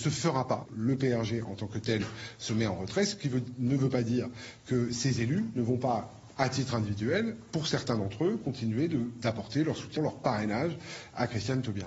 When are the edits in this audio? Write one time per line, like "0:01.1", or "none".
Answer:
0:10.0